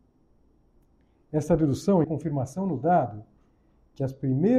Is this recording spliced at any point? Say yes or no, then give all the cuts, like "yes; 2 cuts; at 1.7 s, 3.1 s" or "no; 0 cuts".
yes; 1 cut; at 2.0 s